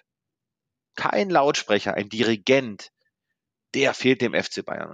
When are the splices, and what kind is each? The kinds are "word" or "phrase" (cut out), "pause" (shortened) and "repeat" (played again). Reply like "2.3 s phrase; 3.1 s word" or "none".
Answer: none